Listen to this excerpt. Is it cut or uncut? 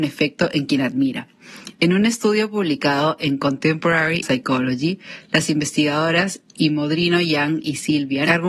cut